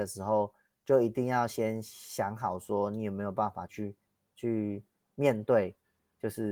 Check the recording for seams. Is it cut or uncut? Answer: cut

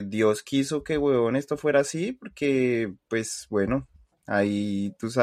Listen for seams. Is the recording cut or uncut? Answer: uncut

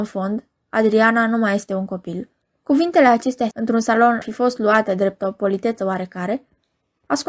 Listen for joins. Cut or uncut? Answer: cut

